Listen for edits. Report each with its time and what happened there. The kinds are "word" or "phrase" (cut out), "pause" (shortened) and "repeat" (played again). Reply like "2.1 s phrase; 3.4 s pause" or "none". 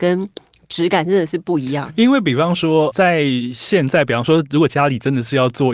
2.9 s word